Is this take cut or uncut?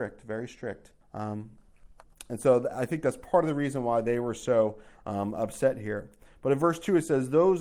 cut